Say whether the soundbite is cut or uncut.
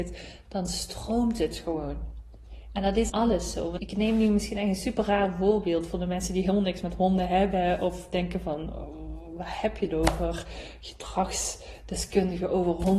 cut